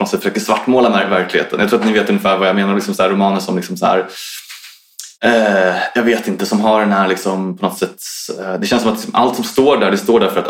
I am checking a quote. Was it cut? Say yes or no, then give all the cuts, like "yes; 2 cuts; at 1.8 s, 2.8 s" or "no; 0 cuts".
yes; 1 cut; at 5.1 s